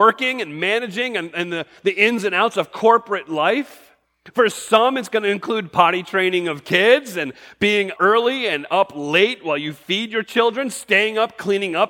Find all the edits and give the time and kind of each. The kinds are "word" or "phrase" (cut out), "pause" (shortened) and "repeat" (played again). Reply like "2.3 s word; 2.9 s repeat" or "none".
8.0 s word